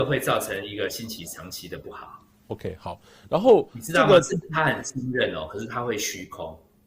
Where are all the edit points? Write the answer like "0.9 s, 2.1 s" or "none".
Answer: none